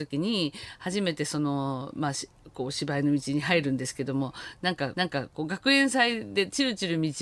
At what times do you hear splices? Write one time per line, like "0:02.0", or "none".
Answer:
0:04.9

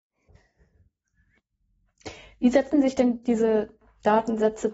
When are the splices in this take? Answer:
none

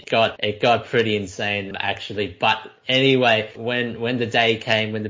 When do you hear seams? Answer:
none

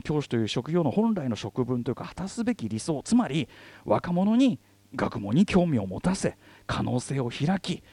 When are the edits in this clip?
none

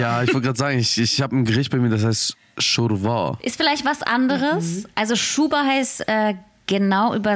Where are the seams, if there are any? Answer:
none

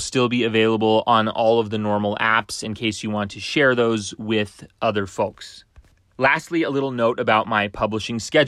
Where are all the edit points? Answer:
none

